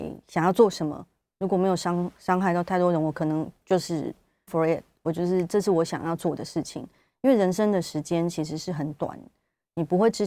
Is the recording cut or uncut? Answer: cut